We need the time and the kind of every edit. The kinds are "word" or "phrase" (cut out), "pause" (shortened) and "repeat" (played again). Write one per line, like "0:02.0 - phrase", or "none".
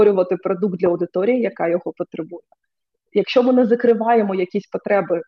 none